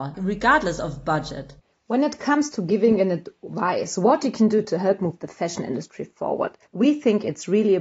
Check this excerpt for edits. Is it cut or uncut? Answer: cut